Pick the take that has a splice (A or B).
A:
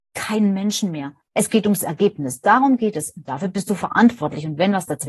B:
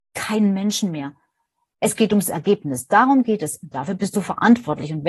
A